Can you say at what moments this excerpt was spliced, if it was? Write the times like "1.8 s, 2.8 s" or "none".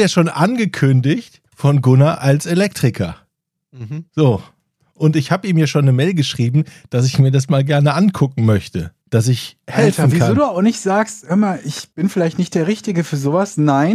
1.5 s, 4.1 s, 9.0 s, 11.9 s